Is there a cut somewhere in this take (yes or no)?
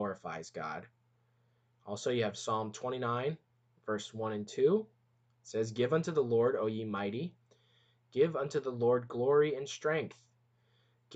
no